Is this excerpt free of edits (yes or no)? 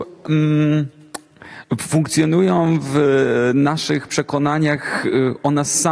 yes